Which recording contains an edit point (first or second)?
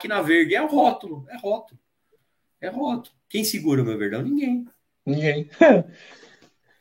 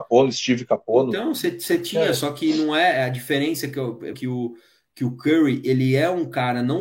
second